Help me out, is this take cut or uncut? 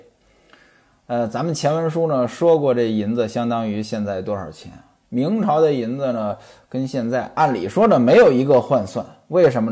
uncut